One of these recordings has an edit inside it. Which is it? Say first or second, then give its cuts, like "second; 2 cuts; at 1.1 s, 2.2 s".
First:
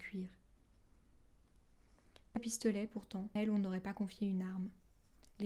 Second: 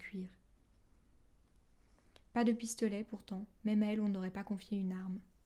first; 2 cuts; at 2.4 s, 3.4 s